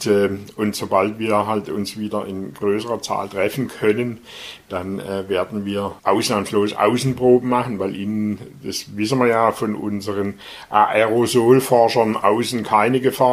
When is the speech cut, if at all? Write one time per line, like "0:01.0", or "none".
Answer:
0:06.0